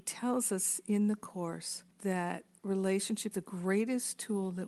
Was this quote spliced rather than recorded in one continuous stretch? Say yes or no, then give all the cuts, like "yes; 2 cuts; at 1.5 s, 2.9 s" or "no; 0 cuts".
yes; 2 cuts; at 1.9 s, 3.3 s